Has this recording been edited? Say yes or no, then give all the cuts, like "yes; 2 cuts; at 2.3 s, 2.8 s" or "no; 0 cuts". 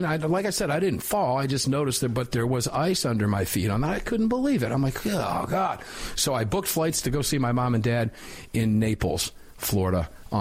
no; 0 cuts